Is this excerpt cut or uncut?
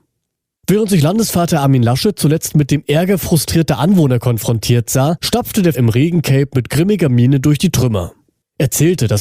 cut